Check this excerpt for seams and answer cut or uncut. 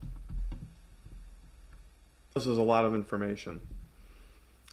cut